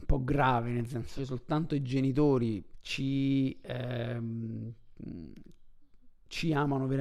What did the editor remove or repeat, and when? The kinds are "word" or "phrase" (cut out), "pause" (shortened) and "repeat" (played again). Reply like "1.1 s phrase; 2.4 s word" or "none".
1.2 s word; 2.7 s word